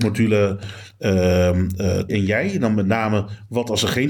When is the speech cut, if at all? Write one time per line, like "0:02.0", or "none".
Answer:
0:02.1